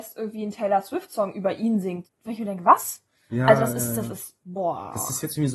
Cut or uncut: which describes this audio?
cut